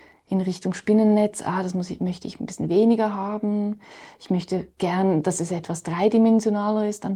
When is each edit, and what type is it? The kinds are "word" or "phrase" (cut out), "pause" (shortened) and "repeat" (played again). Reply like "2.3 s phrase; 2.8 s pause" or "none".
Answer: none